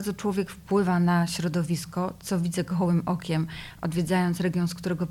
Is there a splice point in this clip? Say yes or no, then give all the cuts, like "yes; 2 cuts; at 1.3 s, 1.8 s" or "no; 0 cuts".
no; 0 cuts